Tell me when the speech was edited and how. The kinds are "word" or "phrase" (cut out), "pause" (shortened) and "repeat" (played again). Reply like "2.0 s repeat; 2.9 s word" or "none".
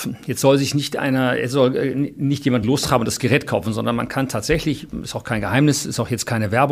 none

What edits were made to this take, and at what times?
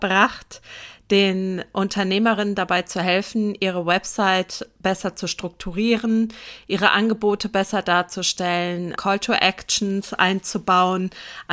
9.0 s word

